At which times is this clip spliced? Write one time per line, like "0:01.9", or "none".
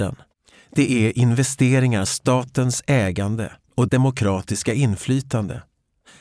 0:02.1
0:03.9